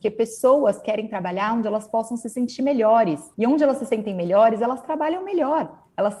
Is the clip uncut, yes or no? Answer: no